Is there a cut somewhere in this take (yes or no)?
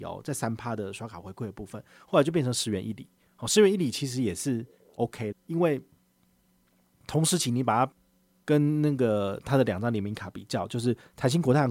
yes